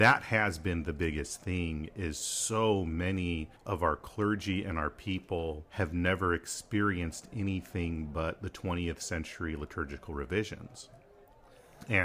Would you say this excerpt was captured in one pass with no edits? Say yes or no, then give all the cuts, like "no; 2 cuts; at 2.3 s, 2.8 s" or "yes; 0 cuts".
no; 2 cuts; at 3.6 s, 5.7 s